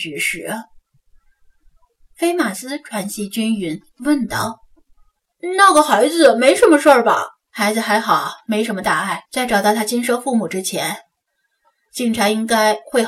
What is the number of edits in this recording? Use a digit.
2